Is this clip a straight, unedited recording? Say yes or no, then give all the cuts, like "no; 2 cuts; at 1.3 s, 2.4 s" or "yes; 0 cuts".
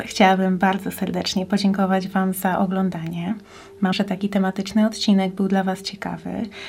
no; 1 cut; at 3.9 s